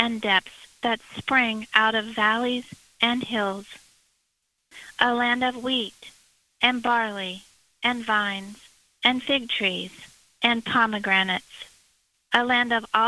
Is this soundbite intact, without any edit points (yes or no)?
yes